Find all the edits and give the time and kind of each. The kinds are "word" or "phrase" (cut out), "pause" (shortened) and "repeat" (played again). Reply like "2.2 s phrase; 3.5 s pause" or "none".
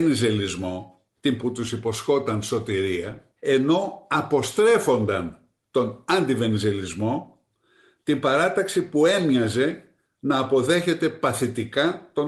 1.4 s word; 3.4 s pause